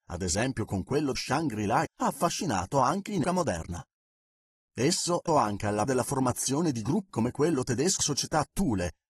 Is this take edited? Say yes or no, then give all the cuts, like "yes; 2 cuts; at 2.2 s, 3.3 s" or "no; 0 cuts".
yes; 7 cuts; at 1.1 s, 1.8 s, 3.2 s, 5.3 s, 5.8 s, 7.1 s, 8.0 s